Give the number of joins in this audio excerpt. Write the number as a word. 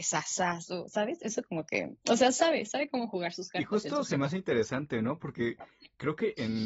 zero